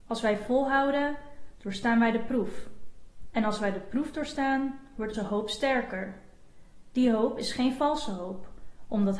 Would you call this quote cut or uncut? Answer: cut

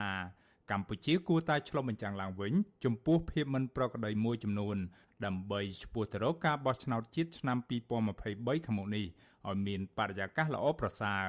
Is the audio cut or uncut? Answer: uncut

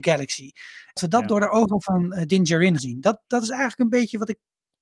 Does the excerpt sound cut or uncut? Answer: cut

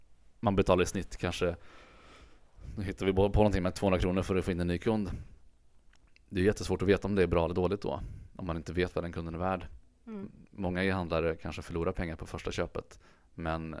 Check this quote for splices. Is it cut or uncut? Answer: uncut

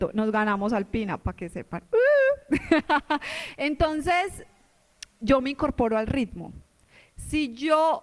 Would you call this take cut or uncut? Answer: uncut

